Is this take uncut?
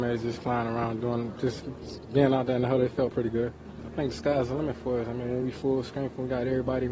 yes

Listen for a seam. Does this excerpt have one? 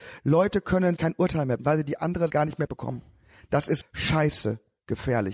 yes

